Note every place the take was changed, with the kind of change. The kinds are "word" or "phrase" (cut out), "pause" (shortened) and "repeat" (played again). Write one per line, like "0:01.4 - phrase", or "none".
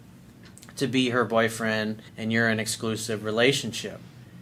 0:02.1 - pause